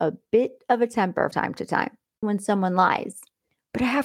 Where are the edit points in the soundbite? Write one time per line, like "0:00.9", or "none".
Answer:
0:01.3
0:02.2